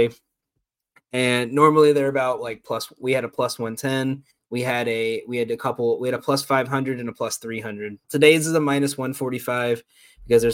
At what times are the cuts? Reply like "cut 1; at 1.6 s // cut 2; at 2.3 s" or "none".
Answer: cut 1; at 4.3 s // cut 2; at 8.0 s